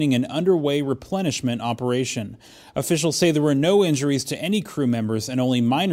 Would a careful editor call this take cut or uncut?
uncut